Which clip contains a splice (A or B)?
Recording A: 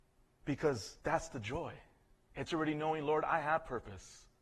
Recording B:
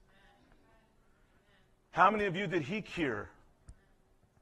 A